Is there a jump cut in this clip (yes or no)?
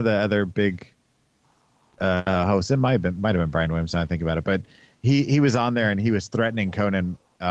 no